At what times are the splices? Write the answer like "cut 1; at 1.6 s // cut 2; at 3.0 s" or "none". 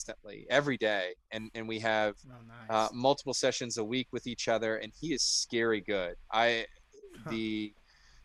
none